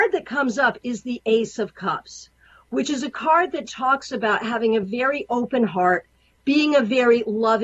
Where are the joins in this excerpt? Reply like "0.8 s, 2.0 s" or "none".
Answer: none